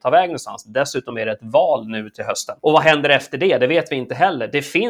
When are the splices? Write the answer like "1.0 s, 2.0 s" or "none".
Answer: 2.6 s